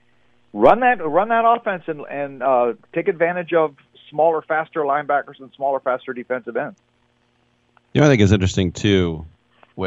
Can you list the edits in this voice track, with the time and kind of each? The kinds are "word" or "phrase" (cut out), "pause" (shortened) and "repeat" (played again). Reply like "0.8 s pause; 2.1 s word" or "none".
none